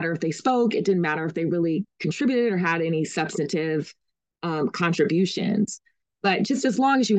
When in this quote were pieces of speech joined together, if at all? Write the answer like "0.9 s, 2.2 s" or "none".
none